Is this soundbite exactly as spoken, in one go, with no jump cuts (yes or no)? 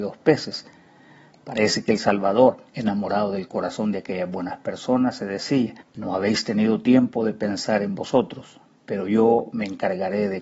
no